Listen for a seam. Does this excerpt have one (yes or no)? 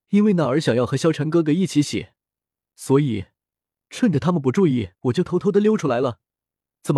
yes